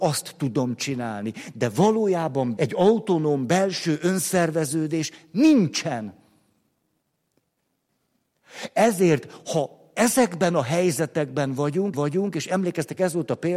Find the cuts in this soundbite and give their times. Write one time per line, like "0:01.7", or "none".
0:02.6
0:11.9